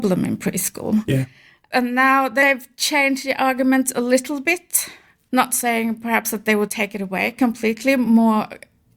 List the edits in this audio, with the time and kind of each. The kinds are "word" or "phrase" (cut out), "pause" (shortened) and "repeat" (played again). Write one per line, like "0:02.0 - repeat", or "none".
none